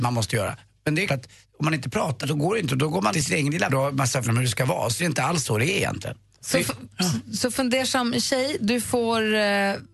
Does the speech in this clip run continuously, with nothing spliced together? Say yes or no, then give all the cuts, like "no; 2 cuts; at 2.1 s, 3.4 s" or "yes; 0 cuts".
no; 6 cuts; at 1.1 s, 2.2 s, 3.1 s, 3.7 s, 4.2 s, 5.0 s